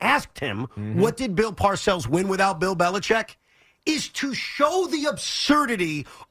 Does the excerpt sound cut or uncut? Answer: uncut